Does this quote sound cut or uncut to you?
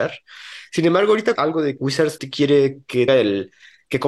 cut